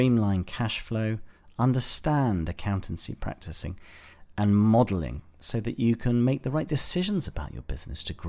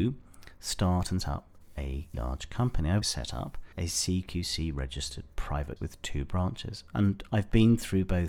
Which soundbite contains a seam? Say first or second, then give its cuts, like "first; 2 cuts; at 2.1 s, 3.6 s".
second; 5 cuts; at 1.2 s, 2.1 s, 3.0 s, 3.7 s, 5.8 s